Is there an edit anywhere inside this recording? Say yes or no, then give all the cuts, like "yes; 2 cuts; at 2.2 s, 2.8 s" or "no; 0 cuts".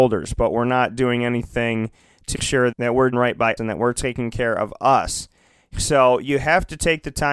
yes; 4 cuts; at 2.3 s, 2.7 s, 3.1 s, 3.6 s